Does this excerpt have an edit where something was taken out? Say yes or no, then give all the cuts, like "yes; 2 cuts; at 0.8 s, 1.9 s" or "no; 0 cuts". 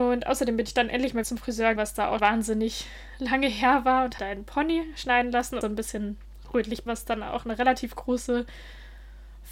yes; 6 cuts; at 1.2 s, 1.8 s, 2.2 s, 4.2 s, 5.6 s, 6.9 s